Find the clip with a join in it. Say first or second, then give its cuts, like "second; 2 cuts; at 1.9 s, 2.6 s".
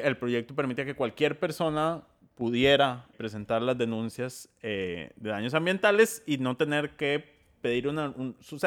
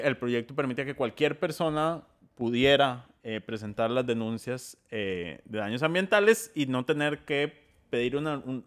first; 1 cut; at 3.1 s